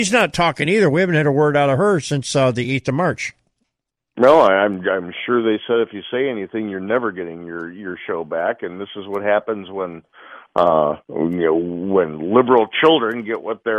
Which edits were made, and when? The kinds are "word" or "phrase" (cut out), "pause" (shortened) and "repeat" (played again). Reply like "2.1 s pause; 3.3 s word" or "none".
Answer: none